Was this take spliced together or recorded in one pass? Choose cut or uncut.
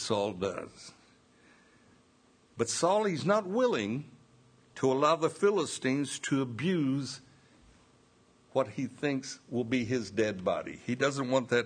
uncut